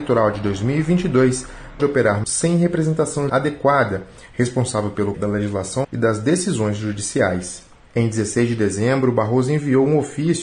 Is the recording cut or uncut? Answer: cut